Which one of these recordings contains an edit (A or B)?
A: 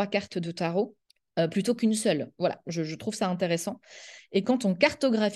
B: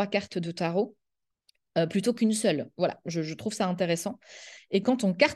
A